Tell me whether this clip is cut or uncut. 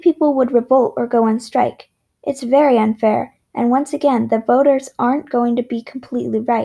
uncut